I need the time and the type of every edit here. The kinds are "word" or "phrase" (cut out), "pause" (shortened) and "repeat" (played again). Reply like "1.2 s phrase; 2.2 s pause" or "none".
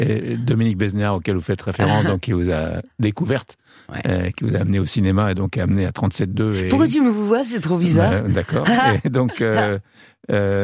none